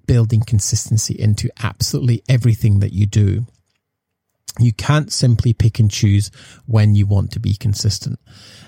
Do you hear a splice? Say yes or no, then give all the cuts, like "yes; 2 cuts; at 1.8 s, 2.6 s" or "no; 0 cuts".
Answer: no; 0 cuts